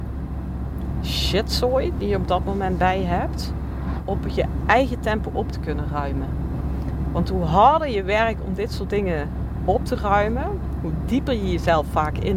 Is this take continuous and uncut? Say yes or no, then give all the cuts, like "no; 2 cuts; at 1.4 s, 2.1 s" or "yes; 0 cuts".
yes; 0 cuts